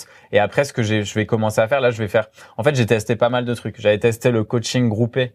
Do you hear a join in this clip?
no; 0 cuts

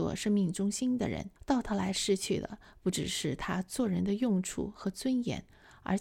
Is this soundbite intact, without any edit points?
no; 1 cut; at 1.4 s

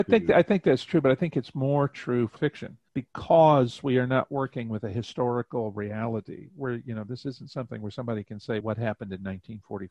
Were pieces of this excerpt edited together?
yes; 3 cuts; at 2.4 s, 2.9 s, 8.6 s

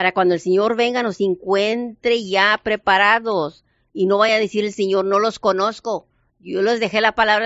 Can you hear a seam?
no; 0 cuts

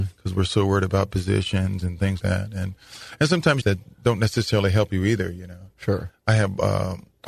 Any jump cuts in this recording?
yes; 2 cuts; at 2.2 s, 3.6 s

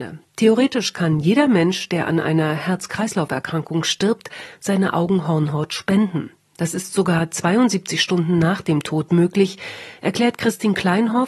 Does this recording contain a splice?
no; 0 cuts

